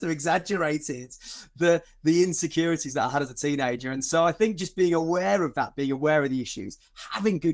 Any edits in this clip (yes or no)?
no